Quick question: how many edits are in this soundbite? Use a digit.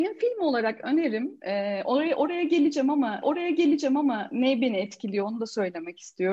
1